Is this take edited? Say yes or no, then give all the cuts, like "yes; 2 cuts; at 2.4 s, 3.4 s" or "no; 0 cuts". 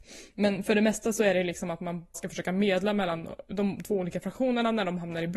yes; 2 cuts; at 2.1 s, 3.5 s